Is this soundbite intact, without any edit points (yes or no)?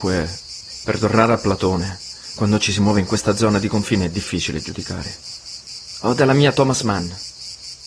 yes